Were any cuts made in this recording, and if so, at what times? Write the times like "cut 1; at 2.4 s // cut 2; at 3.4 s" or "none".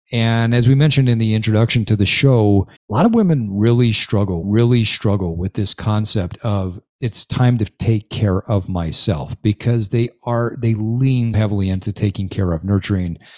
cut 1; at 2.8 s // cut 2; at 4.4 s // cut 3; at 11.3 s